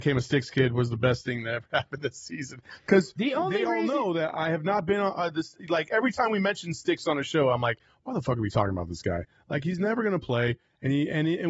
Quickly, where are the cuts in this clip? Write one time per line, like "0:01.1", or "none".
none